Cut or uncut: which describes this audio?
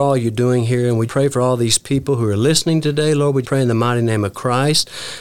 cut